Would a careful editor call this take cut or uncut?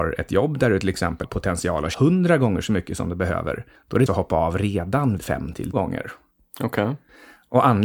cut